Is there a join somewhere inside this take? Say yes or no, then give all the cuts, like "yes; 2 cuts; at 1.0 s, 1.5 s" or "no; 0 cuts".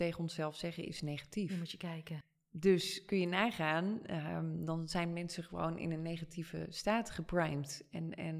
no; 0 cuts